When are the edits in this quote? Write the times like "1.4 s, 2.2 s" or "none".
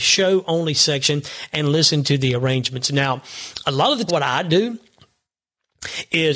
4.1 s